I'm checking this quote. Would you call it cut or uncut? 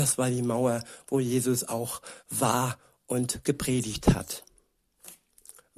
cut